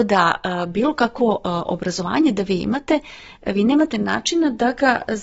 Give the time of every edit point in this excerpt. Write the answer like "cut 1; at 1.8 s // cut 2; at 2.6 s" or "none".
none